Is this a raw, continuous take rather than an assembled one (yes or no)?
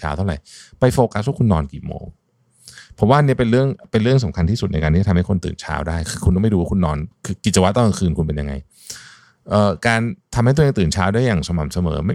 yes